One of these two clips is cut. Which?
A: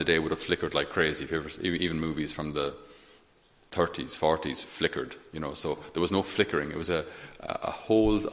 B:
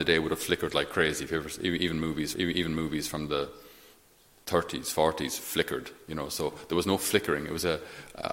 B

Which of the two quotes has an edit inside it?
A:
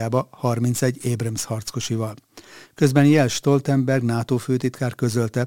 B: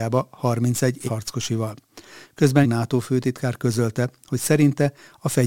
B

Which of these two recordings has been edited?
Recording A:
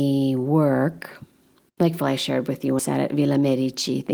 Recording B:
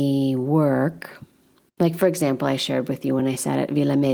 A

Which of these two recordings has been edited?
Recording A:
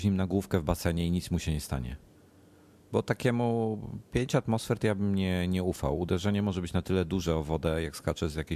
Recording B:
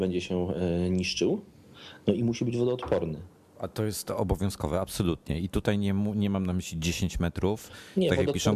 B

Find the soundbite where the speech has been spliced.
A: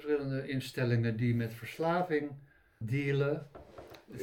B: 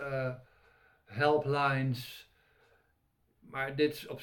A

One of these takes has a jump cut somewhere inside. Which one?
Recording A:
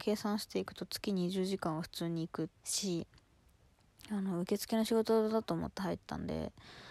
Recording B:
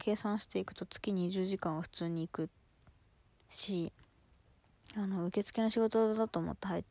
A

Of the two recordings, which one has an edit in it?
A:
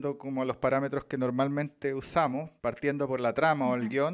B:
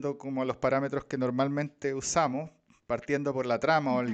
A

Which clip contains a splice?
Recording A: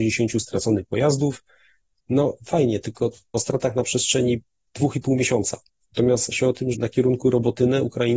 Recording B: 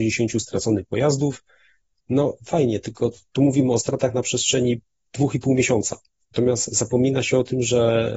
A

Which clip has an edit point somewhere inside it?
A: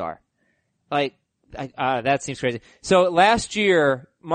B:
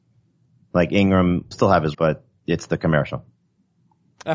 B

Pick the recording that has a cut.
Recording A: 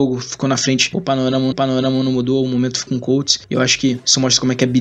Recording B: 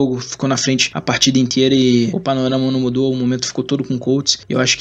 A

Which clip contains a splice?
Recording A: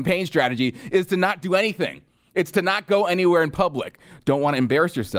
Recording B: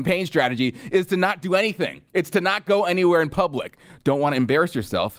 B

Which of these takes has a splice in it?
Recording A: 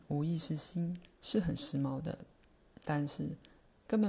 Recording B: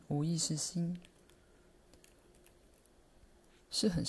A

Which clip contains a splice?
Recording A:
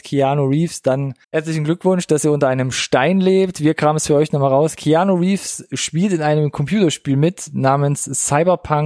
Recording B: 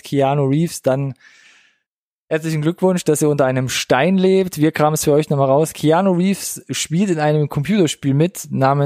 A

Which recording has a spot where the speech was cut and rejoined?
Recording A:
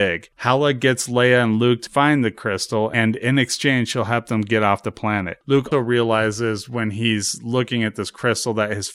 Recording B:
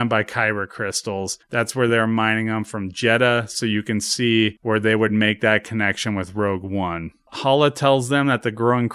A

